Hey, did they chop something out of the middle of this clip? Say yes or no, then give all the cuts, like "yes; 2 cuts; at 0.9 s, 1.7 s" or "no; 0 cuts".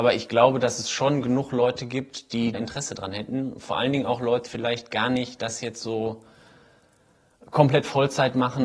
yes; 2 cuts; at 2.5 s, 4.5 s